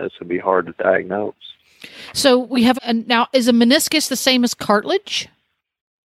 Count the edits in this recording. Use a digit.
1